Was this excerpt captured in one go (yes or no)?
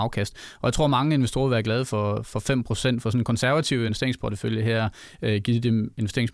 yes